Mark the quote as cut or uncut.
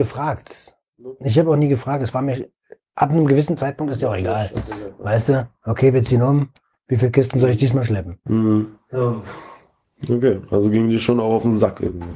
uncut